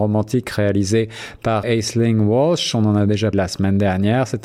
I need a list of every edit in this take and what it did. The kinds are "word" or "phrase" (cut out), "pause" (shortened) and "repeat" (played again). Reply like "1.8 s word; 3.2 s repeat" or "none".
1.6 s word; 3.3 s word